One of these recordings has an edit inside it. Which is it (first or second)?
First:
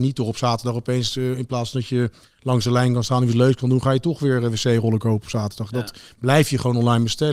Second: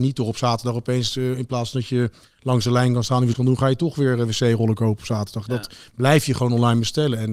second